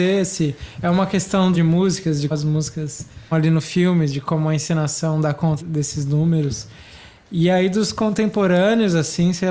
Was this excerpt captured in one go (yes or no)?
no